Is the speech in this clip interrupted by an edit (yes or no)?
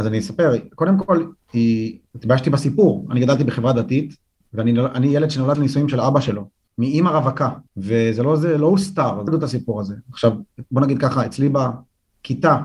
yes